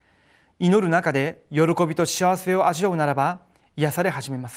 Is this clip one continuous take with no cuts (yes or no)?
yes